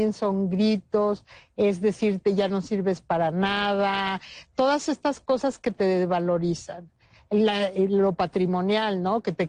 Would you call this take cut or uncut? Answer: uncut